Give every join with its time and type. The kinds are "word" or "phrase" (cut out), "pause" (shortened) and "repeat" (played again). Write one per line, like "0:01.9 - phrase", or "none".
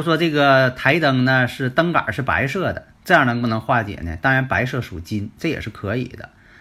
0:02.9 - pause

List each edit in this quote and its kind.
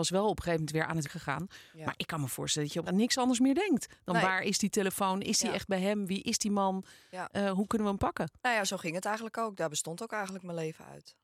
0:01.0 - word
0:02.9 - word
0:08.4 - pause

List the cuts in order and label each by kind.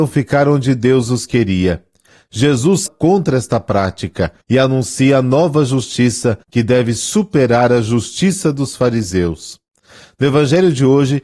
0:02.9 - phrase
0:04.4 - pause
0:06.4 - pause

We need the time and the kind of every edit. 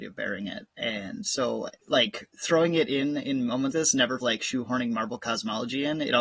0:03.7 - word
0:04.2 - word

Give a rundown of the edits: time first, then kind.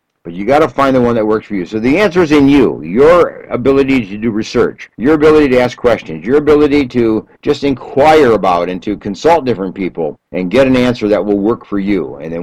0:04.9 - pause
0:07.3 - pause
0:10.3 - pause

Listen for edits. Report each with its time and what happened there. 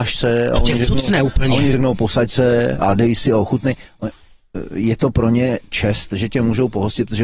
none

